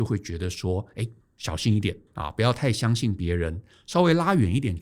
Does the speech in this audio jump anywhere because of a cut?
no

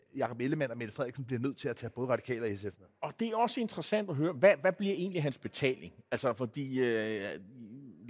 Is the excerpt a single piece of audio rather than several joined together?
yes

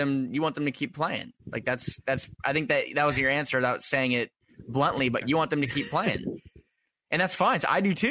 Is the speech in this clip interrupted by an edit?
no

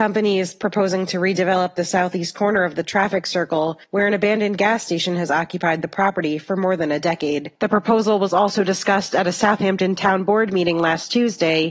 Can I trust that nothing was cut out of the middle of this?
no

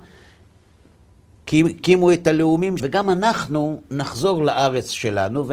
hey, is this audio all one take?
no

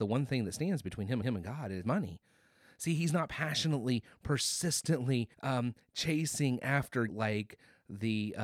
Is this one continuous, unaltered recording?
no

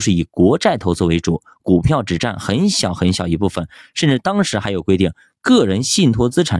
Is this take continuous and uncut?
yes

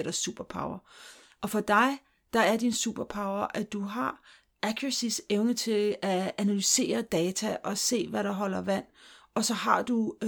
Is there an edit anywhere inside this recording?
no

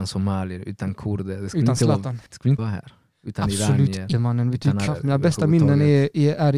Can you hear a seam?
yes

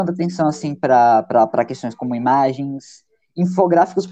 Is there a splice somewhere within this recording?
no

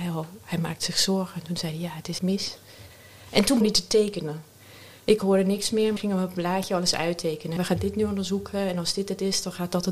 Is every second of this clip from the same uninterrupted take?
no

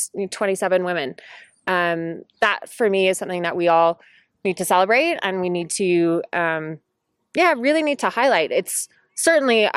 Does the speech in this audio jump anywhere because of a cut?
no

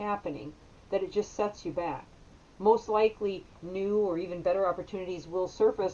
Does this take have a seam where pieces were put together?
no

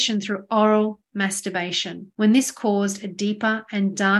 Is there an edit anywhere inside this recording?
no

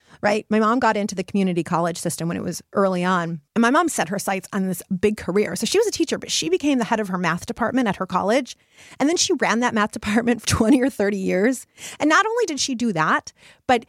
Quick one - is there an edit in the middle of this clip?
yes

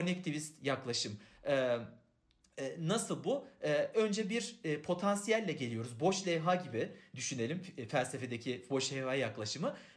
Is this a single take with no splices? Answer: yes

